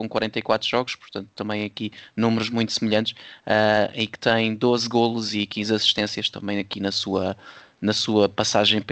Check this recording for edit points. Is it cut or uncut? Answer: uncut